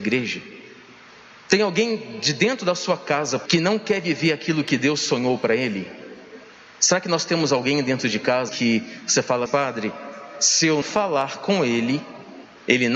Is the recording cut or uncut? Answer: cut